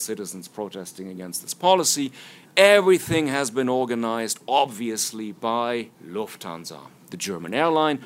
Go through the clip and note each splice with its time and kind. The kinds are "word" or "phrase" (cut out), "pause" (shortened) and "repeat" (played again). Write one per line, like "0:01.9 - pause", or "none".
0:05.9 - pause